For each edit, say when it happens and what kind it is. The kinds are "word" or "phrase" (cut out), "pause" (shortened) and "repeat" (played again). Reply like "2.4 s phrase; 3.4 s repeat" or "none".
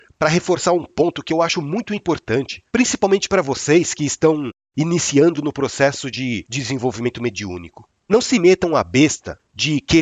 2.7 s pause; 8.0 s pause